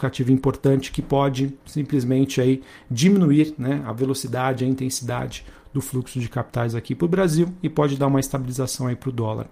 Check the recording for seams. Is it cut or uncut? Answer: cut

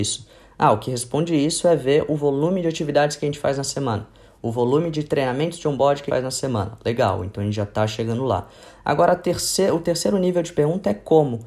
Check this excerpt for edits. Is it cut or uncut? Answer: cut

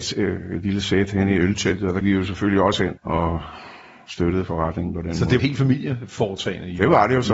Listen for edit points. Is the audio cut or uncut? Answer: cut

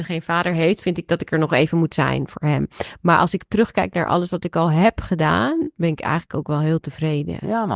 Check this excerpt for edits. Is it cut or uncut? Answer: uncut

